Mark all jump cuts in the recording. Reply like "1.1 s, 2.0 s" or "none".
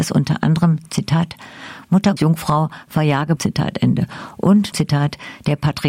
2.2 s, 3.4 s, 4.7 s